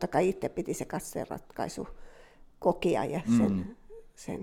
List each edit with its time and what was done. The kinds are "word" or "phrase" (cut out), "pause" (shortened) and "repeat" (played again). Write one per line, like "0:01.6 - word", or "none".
none